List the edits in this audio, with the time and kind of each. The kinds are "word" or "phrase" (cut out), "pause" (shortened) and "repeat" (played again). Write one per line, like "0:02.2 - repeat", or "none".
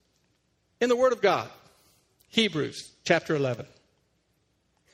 none